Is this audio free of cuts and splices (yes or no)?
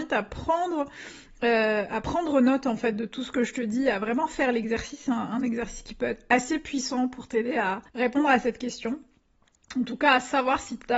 no